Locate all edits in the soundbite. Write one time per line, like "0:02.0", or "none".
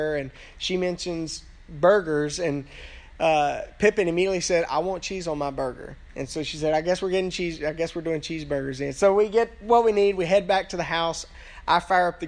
none